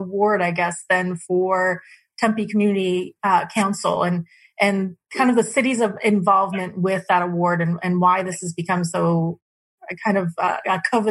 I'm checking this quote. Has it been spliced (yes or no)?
no